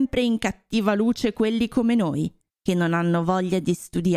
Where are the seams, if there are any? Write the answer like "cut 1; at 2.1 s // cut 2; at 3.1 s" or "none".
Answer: cut 1; at 2.5 s